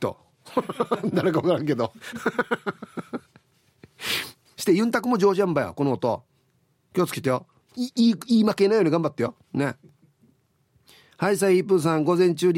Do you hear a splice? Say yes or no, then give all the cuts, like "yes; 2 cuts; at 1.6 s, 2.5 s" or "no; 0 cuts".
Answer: no; 0 cuts